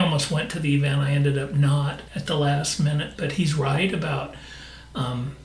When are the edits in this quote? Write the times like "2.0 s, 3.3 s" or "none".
2.1 s

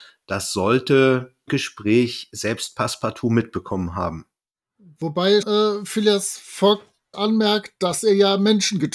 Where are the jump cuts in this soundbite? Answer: 1.5 s, 5.4 s, 7.1 s

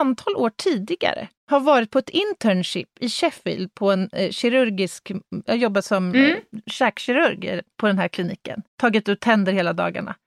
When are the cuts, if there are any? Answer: 1.4 s, 7.7 s, 8.7 s

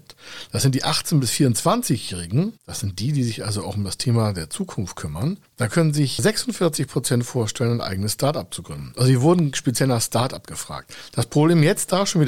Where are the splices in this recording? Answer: 2.6 s

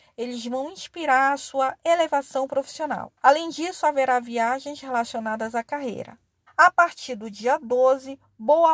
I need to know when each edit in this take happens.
3.2 s, 6.5 s

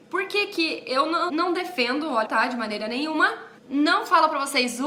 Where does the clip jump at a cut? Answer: 1.3 s, 2.2 s, 3.6 s

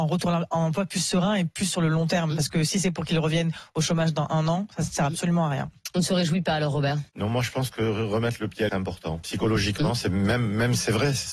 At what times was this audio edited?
7.1 s, 8.7 s

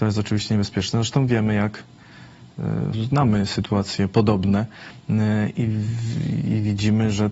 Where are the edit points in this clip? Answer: 2.9 s

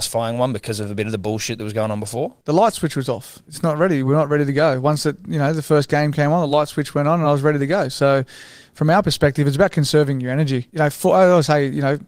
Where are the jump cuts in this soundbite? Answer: none

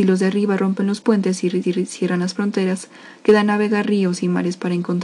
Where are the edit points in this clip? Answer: 1.6 s

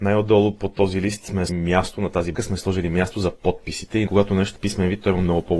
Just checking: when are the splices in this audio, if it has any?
1.5 s, 2.3 s, 4.1 s, 4.6 s

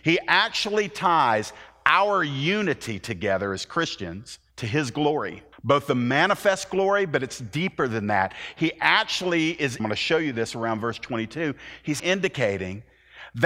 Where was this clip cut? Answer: 4.5 s, 5.5 s, 9.8 s, 12.0 s

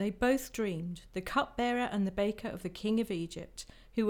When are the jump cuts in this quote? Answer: none

